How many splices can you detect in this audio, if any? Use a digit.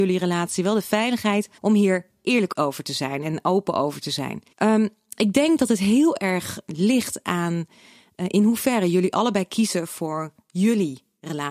2